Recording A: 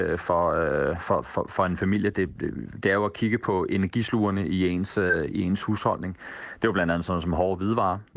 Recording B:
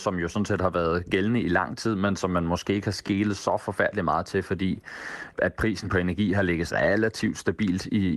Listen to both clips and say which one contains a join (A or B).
B